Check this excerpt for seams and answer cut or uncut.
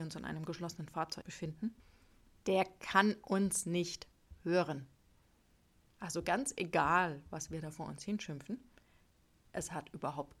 uncut